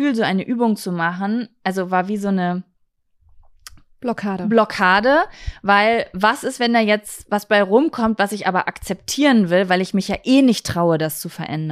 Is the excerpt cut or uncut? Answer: uncut